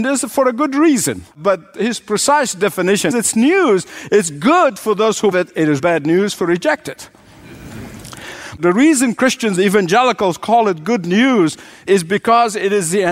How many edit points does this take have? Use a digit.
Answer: 6